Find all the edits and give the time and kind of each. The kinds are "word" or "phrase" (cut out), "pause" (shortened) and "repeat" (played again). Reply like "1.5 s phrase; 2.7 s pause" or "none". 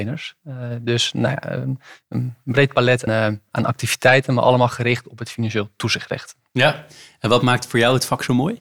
3.1 s word